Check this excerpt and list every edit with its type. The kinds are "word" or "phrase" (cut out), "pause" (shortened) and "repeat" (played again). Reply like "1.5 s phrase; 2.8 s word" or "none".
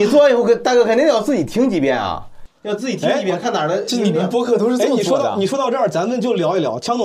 2.5 s pause

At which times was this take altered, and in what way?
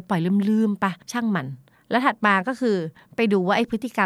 1.0 s pause; 1.7 s pause

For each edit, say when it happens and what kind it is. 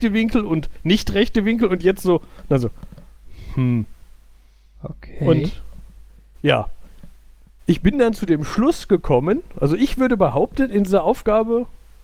none

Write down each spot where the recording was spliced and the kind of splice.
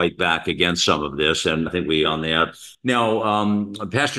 1.7 s word; 2.0 s word; 2.7 s pause

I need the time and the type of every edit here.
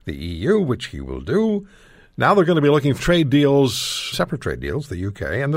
3.0 s word; 4.1 s word

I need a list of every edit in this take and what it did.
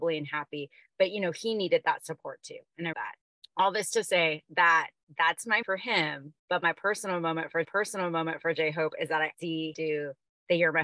2.9 s phrase; 5.0 s pause; 5.6 s word; 6.4 s pause; 7.6 s repeat; 9.3 s phrase; 9.7 s word

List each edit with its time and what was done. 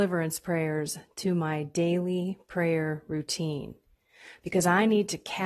none

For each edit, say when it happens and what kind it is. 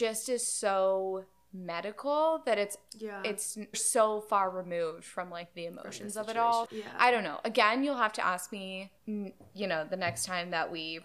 3.7 s word; 6.7 s word; 9.0 s pause

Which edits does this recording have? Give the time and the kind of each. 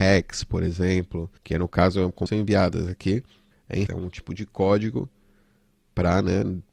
1.4 s pause; 2.3 s phrase; 3.5 s pause; 3.9 s word

